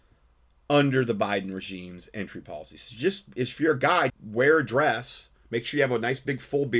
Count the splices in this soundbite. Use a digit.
1